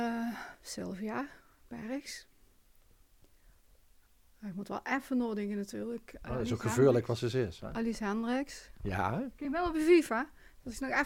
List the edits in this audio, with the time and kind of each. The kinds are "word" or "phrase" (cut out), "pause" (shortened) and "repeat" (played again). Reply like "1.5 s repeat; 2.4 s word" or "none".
none